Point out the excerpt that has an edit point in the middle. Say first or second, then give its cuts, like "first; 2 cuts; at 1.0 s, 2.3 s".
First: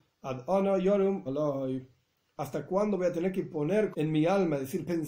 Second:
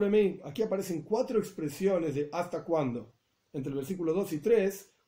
first; 2 cuts; at 1.3 s, 3.9 s